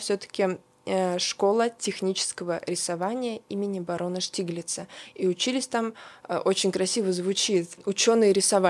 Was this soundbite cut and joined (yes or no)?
no